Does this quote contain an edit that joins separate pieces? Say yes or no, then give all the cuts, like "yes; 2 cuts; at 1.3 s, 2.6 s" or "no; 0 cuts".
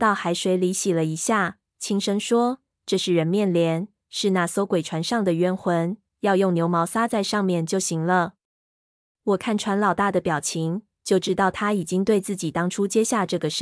no; 0 cuts